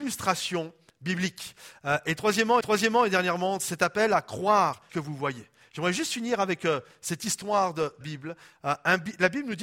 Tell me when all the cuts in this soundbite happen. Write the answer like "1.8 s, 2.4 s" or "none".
2.6 s, 4.9 s, 8.0 s